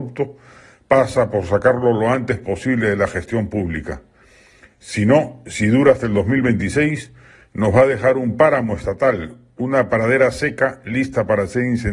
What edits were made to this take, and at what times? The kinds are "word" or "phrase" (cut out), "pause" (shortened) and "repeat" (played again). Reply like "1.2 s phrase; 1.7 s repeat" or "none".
none